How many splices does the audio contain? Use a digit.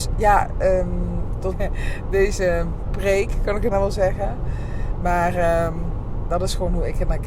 3